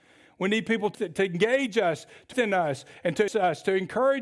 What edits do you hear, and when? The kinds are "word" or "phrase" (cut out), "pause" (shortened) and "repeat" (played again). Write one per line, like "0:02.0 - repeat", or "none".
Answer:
0:00.9 - word
0:02.3 - word
0:03.3 - word